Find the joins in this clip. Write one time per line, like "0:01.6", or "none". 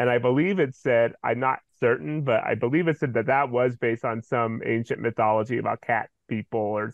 none